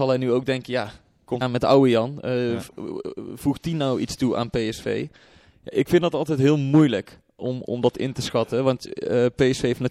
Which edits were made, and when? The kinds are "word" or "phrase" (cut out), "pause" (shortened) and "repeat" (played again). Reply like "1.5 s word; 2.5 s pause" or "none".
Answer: 1.4 s word